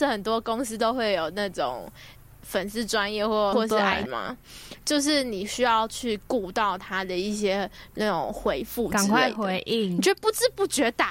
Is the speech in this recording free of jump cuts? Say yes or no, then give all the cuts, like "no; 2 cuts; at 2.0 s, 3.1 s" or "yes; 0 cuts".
no; 2 cuts; at 3.5 s, 4.1 s